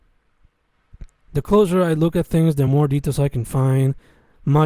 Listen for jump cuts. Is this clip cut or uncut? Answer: uncut